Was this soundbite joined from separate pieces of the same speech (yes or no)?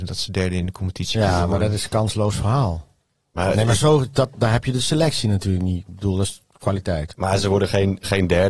no